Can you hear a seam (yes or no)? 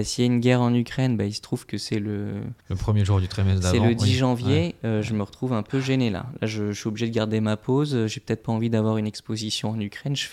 yes